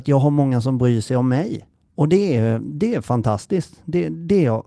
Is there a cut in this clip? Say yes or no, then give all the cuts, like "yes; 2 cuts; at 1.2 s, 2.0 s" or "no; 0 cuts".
no; 0 cuts